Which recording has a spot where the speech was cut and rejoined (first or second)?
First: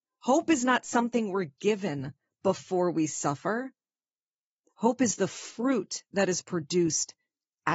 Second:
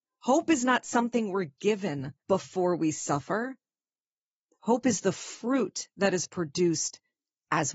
second